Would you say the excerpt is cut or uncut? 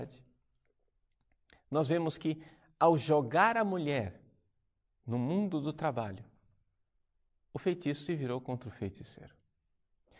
uncut